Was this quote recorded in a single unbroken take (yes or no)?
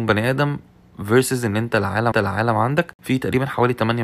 no